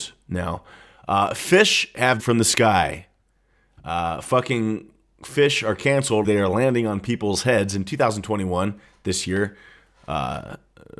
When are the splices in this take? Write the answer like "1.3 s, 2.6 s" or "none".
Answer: 2.2 s, 6.2 s

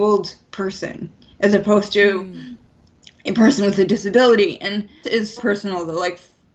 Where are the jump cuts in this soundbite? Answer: 5.0 s, 5.4 s

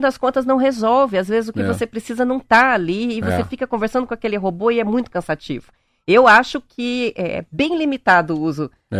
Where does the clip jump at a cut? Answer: none

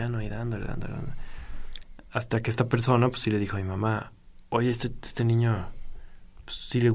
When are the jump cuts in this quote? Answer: none

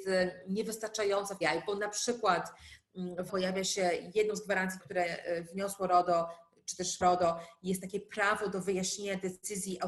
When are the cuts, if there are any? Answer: 1.4 s, 3.3 s, 4.8 s, 7.0 s

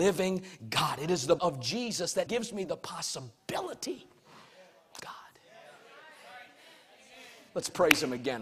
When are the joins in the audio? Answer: 1.4 s, 2.3 s, 5.0 s

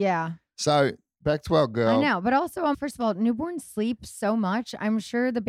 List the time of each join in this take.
2.7 s

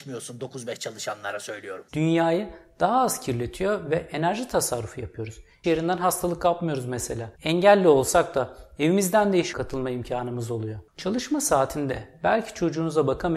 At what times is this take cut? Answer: 1.9 s, 5.6 s, 7.3 s, 9.5 s

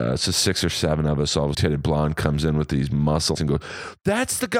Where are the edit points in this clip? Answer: 1.5 s, 3.4 s

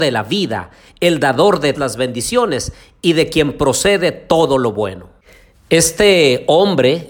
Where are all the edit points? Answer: 1.7 s

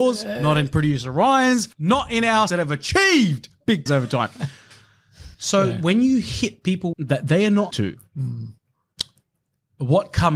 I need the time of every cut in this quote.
1.7 s, 2.5 s, 3.9 s, 5.3 s, 6.9 s, 7.7 s

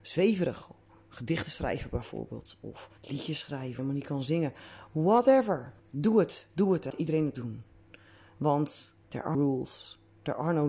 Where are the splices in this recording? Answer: 3.0 s, 3.8 s, 5.8 s, 6.9 s, 7.3 s, 9.0 s, 9.3 s

